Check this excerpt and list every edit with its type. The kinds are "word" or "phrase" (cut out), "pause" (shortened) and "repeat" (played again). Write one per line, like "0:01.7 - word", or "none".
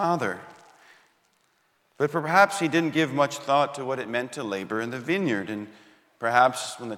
none